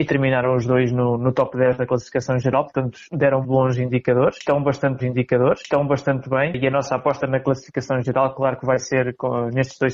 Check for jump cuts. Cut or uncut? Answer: cut